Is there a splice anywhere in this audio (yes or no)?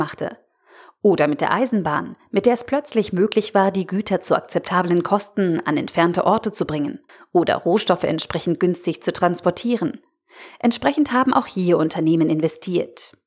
yes